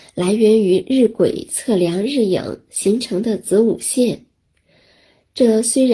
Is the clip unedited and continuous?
yes; 0 cuts

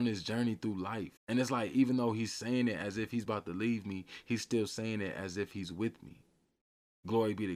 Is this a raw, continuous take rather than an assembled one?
no; 1 cut; at 1.2 s

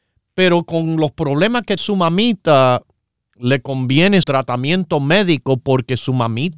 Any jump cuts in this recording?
yes; 2 cuts; at 1.8 s, 4.2 s

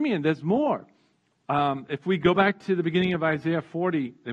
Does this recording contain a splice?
no; 0 cuts

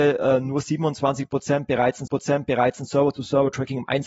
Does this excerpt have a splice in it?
yes; 1 cut; at 2.1 s

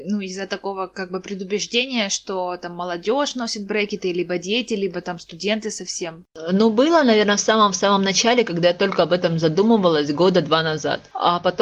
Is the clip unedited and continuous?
yes; 0 cuts

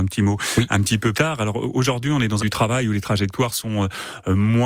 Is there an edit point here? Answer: yes; 2 cuts; at 1.1 s, 2.4 s

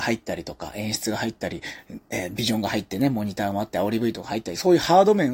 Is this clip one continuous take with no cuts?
yes; 0 cuts

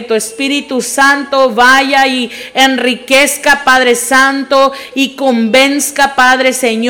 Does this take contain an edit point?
no; 0 cuts

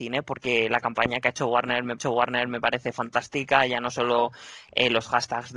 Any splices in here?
yes; 1 cut; at 2.0 s

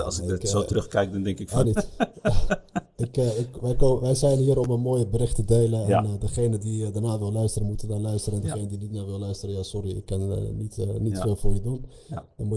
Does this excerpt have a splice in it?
yes; 1 cut; at 1.6 s

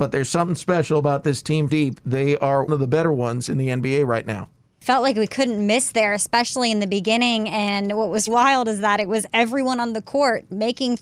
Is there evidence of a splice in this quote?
yes; 3 cuts; at 1.7 s, 2.7 s, 8.3 s

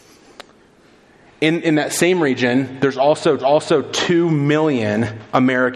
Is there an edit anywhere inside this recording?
yes; 1 cut; at 3.4 s

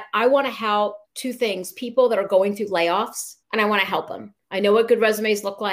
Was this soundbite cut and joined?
yes; 3 cuts; at 1.0 s, 3.4 s, 4.4 s

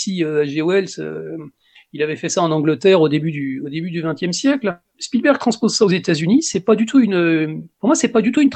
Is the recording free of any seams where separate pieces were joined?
yes; 0 cuts

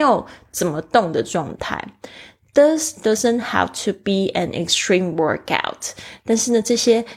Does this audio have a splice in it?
no; 0 cuts

